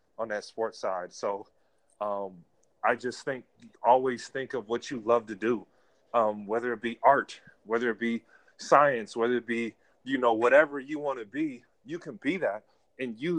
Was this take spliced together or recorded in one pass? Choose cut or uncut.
uncut